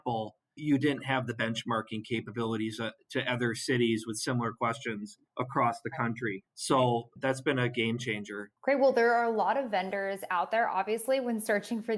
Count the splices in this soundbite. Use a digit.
3